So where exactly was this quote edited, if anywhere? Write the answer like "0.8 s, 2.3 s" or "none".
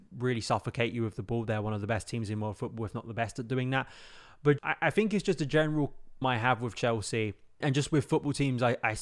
4.6 s, 6.2 s, 7.6 s